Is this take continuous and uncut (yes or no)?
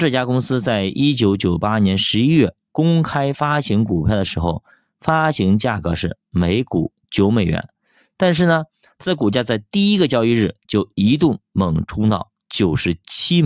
yes